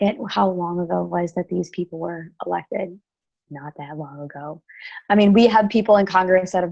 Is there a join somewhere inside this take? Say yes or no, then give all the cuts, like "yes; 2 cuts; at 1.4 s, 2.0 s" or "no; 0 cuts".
no; 0 cuts